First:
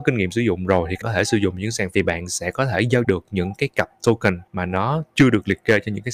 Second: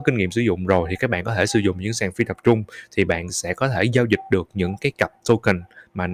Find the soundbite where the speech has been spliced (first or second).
first